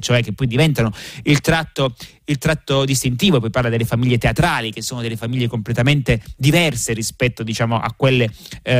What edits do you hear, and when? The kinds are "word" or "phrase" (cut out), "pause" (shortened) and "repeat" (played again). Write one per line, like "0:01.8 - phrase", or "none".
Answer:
none